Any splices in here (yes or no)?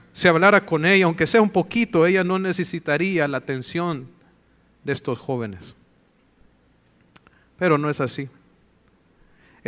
no